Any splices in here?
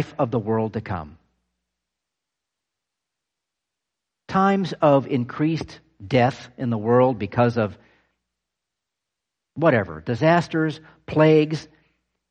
no; 0 cuts

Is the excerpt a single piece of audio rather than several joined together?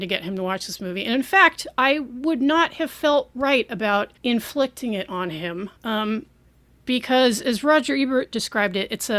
no; 2 cuts; at 4.2 s, 5.8 s

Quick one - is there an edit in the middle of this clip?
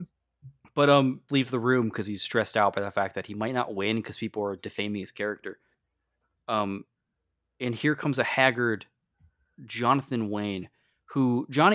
yes; 1 cut; at 1.3 s

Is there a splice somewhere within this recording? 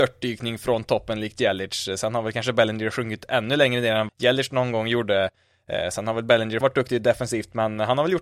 yes; 2 cuts; at 4.1 s, 6.6 s

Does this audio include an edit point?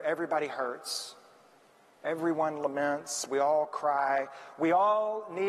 no; 0 cuts

